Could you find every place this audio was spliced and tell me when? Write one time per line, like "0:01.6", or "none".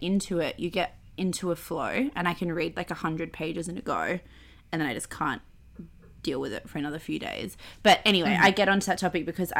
none